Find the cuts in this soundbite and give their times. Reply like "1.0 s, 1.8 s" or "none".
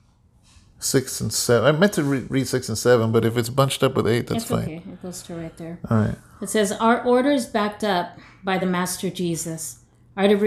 none